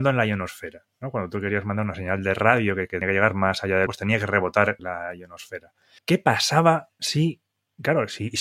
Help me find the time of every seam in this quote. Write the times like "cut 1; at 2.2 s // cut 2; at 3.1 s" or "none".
cut 1; at 3.0 s // cut 2; at 3.9 s // cut 3; at 4.8 s // cut 4; at 6.0 s